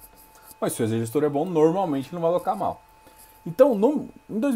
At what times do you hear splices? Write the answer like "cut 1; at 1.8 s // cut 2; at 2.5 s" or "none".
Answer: none